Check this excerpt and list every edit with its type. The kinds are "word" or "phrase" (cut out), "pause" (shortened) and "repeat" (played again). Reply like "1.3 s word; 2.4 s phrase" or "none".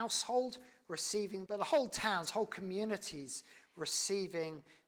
1.5 s word